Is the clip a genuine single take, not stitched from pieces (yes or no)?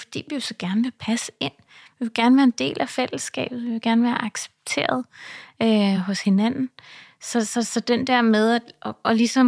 yes